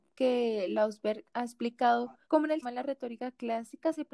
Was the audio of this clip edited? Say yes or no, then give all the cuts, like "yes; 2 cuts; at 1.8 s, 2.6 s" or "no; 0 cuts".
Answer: yes; 2 cuts; at 2.2 s, 2.6 s